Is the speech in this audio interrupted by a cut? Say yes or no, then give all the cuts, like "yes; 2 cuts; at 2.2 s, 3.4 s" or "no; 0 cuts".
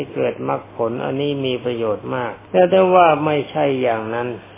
yes; 1 cut; at 2.4 s